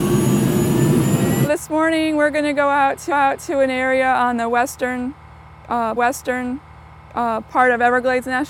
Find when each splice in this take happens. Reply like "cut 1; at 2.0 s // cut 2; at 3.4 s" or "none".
cut 1; at 3.1 s // cut 2; at 6.0 s